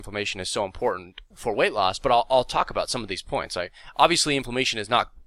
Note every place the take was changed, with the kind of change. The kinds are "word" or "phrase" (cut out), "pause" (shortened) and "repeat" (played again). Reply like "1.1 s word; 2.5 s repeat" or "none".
1.3 s word